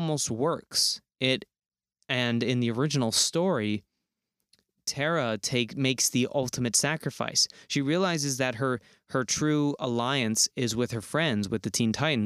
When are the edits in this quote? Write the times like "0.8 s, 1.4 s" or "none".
none